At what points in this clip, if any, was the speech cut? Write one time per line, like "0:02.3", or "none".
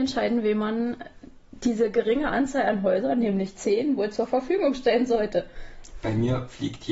none